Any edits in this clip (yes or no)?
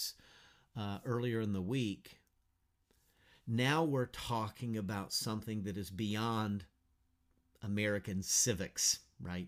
no